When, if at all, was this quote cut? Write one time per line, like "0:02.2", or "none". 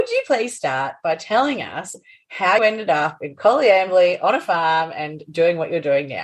0:02.6